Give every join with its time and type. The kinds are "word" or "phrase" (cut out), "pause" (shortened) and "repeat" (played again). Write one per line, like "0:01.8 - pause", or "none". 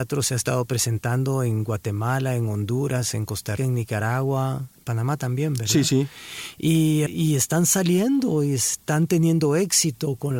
0:03.6 - word
0:07.1 - word

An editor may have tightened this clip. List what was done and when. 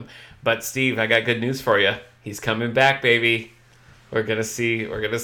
none

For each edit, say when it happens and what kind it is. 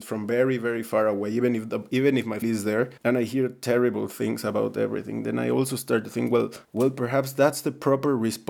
0:02.4 - word
0:03.0 - pause
0:06.6 - pause

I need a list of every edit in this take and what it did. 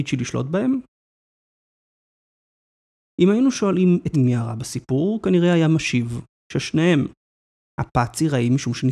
0:04.1 - word

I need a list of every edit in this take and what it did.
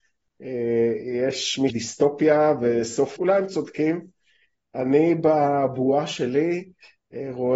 0:01.7 - phrase
0:03.2 - word

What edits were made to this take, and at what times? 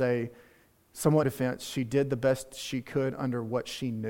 0:01.2 - phrase

